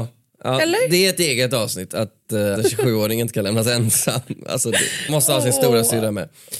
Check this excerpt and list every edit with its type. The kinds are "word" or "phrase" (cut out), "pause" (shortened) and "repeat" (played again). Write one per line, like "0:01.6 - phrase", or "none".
0:02.6 - phrase
0:05.1 - phrase